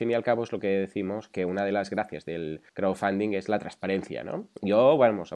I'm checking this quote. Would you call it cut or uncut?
cut